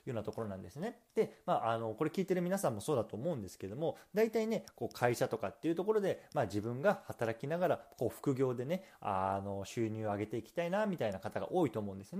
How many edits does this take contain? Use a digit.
1